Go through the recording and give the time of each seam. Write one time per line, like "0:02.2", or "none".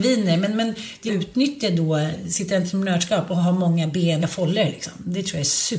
0:01.1
0:04.2

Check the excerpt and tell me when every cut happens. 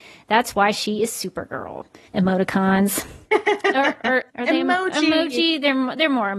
0:02.1
0:04.3

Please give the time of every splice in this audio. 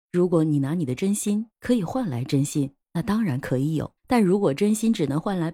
0:01.5
0:02.8
0:04.0

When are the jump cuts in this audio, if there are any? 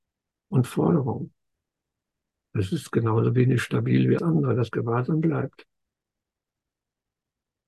0:04.2

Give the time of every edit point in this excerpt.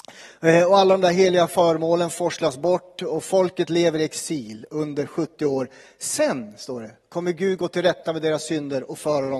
none

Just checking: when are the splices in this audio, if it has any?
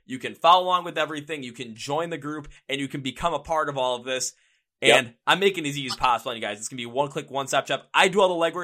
none

